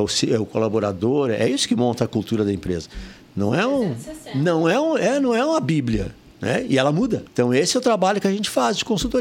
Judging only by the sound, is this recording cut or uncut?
uncut